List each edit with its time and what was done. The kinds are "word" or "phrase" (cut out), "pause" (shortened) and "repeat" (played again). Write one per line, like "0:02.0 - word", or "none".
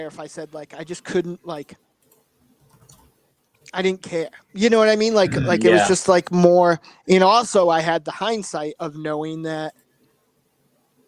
none